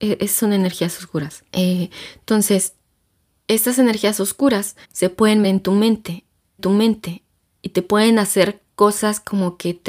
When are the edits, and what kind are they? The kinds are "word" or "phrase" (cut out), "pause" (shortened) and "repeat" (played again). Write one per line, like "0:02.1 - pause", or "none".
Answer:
0:01.5 - pause
0:04.8 - pause
0:05.4 - word
0:06.6 - repeat